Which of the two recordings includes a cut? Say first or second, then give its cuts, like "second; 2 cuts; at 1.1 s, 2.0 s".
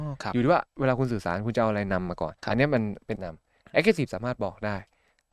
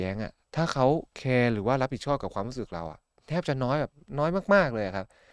first; 2 cuts; at 2.4 s, 3.2 s